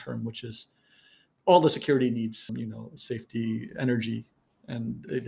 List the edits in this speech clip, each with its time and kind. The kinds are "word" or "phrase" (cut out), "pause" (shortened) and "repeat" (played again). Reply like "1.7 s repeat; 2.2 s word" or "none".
2.5 s word; 3.0 s word